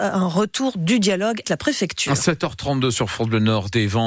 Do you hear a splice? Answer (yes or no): yes